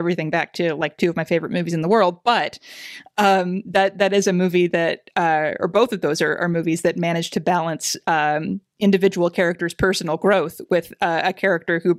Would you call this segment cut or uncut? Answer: uncut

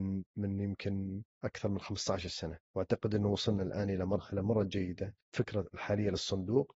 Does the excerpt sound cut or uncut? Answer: cut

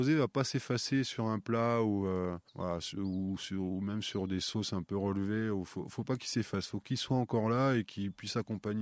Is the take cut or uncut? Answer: cut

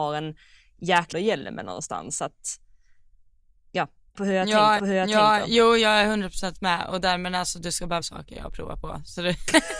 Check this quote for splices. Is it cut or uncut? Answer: cut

